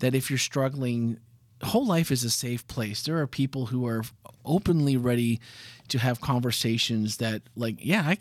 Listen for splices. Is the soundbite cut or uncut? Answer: uncut